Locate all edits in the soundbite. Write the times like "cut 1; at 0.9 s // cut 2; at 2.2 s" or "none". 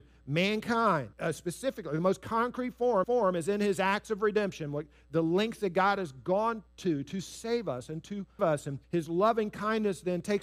cut 1; at 1.1 s // cut 2; at 3.0 s // cut 3; at 6.7 s // cut 4; at 8.4 s // cut 5; at 8.8 s